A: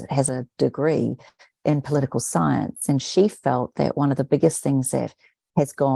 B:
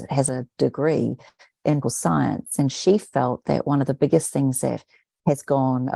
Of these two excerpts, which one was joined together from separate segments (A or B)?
B